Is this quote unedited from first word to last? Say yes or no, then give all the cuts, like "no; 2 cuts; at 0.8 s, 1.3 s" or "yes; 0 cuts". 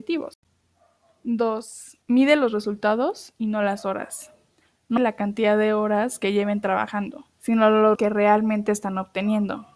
no; 4 cuts; at 2.0 s, 5.0 s, 7.3 s, 7.9 s